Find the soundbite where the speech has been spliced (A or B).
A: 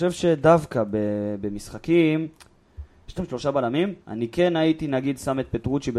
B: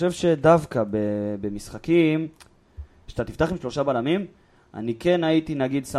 A